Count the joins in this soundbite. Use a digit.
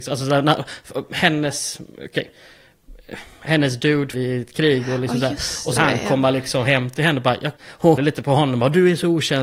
4